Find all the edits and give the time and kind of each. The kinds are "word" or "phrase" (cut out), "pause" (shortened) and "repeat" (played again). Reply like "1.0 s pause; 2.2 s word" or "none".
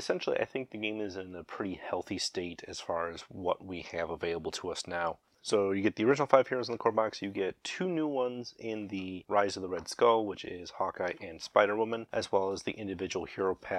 none